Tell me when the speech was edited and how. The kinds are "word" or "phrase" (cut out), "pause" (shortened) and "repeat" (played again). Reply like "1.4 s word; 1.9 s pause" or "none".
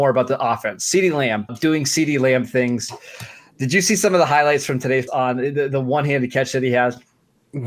1.5 s word; 5.1 s word